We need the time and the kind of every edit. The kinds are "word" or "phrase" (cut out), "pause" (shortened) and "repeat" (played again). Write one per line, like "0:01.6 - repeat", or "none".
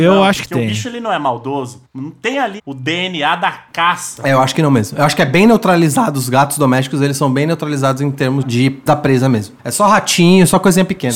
0:02.6 - word
0:08.9 - word
0:09.6 - pause

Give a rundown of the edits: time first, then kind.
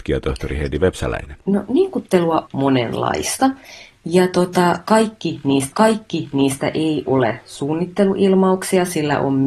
0:01.4 - pause
0:02.5 - word
0:05.7 - repeat

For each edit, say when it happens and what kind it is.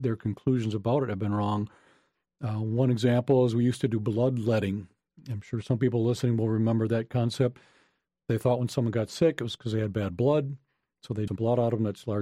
0:11.3 - word

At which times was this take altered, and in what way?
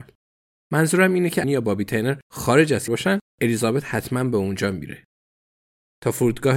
0:01.4 - phrase
0:02.9 - word

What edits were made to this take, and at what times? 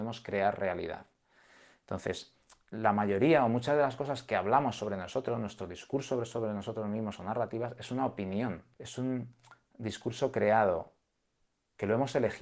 0:08.7 - pause

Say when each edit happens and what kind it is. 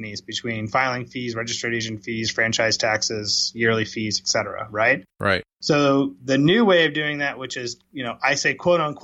0:07.9 - pause

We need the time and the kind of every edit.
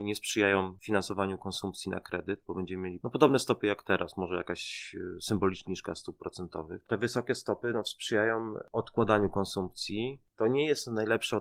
0:05.7 - word

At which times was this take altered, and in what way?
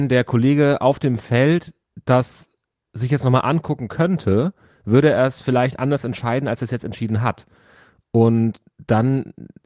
none

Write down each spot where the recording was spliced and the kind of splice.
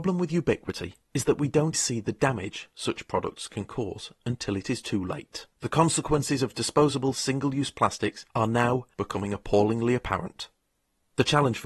0:01.7 - word
0:05.5 - pause
0:08.3 - pause

